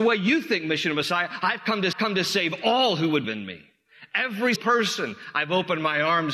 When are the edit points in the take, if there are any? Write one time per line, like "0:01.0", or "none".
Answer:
0:01.9
0:03.2
0:04.6